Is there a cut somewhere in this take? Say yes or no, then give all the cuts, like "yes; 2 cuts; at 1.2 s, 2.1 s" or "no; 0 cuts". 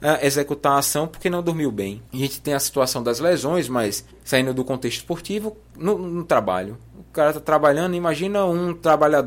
yes; 2 cuts; at 2.1 s, 4.1 s